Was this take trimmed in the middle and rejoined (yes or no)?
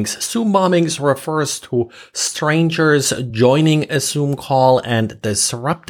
no